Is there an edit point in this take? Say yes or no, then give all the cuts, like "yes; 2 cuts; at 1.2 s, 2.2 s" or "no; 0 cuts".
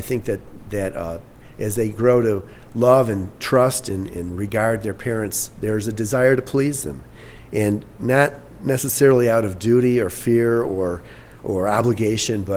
no; 0 cuts